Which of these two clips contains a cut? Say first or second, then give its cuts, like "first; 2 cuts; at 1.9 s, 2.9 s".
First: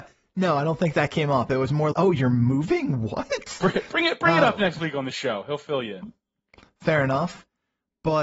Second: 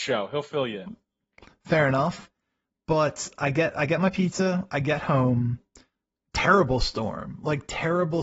first; 1 cut; at 1.9 s